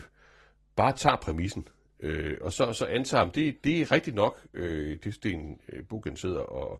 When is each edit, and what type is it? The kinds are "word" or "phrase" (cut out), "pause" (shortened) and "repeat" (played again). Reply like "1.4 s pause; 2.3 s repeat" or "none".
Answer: none